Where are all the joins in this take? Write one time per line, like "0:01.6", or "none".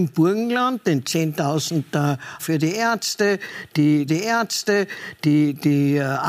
0:02.4
0:04.1